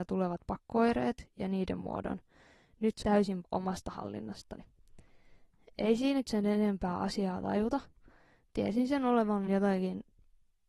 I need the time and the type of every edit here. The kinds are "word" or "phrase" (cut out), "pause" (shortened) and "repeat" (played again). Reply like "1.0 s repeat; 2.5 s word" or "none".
3.0 s word; 3.4 s word; 6.2 s word; 9.5 s word